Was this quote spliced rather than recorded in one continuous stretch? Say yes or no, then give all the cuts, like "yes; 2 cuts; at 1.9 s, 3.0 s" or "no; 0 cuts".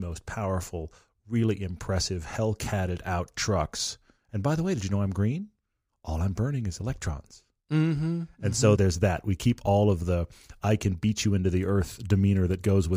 yes; 1 cut; at 8.8 s